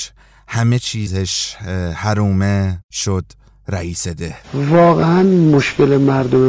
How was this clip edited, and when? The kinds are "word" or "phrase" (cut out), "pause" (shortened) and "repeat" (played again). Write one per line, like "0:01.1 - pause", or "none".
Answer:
0:02.8 - pause
0:04.4 - pause